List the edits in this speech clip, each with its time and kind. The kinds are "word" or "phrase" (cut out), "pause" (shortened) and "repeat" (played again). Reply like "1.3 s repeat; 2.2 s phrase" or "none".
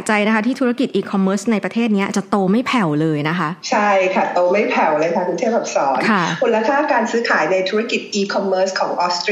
3.6 s pause

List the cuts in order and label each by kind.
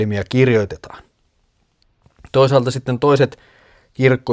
none

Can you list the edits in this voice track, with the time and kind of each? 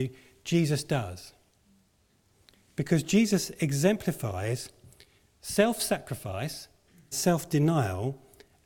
7.1 s word

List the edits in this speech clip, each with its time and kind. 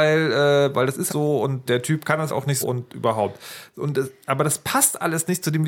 1.1 s word; 1.7 s word; 2.3 s word; 2.6 s word

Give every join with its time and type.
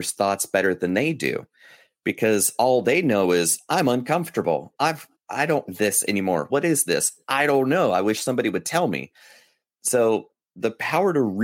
5.7 s word; 6.5 s word

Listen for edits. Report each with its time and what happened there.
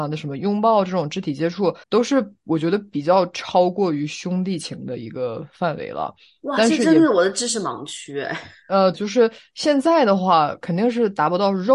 1.8 s pause; 8.9 s word

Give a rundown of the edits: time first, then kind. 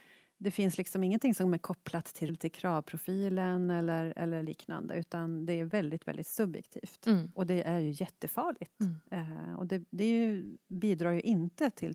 2.3 s word

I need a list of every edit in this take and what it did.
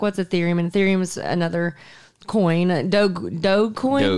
none

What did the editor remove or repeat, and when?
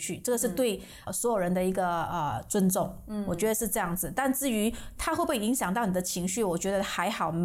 1.1 s word

